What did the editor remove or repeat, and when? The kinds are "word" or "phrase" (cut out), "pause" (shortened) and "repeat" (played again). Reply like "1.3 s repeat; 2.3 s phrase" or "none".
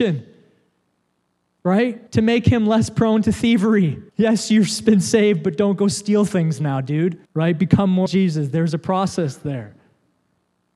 2.1 s pause; 4.1 s pause; 7.2 s pause; 8.1 s word